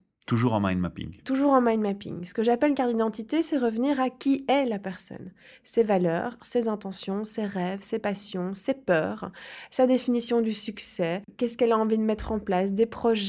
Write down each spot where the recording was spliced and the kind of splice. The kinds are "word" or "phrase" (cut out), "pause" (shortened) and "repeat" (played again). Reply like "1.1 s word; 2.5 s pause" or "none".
none